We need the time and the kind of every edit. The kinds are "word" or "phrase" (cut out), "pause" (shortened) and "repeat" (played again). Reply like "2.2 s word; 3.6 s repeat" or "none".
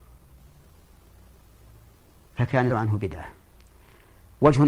2.7 s word